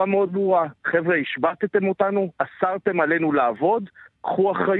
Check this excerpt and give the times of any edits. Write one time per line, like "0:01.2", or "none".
none